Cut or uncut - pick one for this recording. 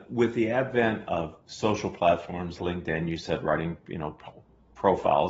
cut